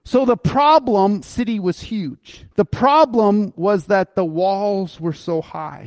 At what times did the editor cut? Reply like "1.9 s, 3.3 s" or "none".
1.2 s, 2.5 s